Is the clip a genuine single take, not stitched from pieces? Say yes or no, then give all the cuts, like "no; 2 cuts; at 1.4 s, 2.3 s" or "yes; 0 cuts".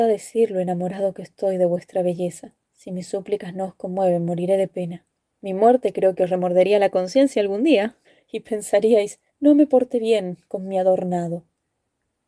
no; 4 cuts; at 2.6 s, 5.2 s, 8.0 s, 9.3 s